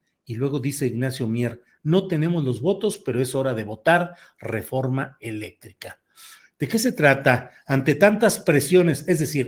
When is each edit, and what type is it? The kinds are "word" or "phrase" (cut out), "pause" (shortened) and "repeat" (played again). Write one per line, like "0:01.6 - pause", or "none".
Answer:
none